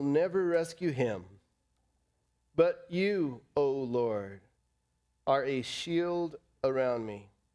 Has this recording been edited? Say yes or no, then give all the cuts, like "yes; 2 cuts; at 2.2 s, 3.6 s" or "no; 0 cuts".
no; 0 cuts